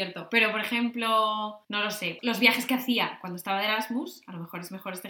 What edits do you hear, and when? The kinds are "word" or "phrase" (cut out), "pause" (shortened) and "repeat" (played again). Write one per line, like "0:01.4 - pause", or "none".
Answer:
0:01.6 - pause
0:02.2 - word